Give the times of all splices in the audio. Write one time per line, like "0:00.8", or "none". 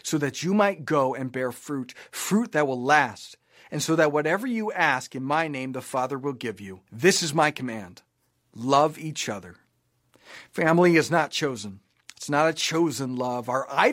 0:06.9